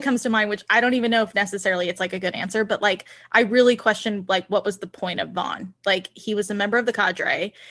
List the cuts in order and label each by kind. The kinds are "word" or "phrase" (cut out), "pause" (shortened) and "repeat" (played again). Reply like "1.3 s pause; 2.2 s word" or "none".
5.8 s pause